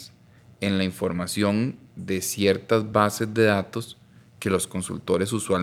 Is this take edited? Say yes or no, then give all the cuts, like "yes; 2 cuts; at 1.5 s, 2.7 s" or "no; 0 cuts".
no; 0 cuts